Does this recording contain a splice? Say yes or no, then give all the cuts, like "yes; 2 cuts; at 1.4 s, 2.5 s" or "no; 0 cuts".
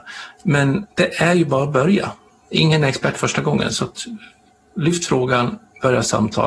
no; 0 cuts